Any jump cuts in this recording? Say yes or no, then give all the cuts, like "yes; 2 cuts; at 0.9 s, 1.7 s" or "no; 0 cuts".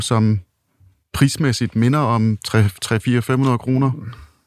no; 0 cuts